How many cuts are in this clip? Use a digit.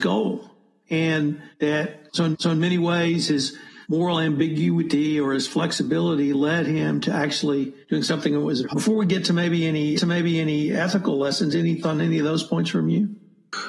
7